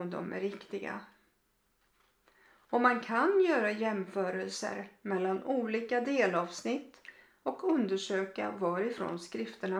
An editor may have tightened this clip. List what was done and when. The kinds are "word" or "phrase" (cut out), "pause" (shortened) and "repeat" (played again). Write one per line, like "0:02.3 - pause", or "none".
none